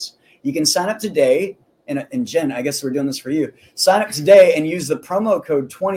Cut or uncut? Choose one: uncut